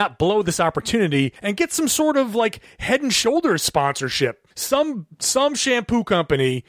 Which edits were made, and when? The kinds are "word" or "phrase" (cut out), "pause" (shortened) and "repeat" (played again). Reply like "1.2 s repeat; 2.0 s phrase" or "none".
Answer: 1.4 s pause; 4.5 s pause